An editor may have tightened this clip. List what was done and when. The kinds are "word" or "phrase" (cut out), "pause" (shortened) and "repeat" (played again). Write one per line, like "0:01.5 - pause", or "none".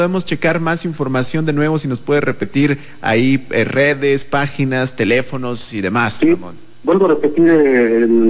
none